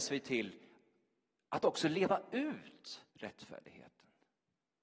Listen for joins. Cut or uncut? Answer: cut